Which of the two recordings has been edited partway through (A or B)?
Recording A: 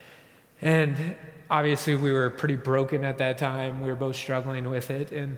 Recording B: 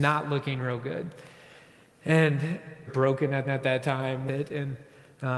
B